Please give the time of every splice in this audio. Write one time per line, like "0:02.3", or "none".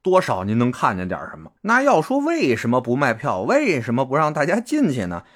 0:01.6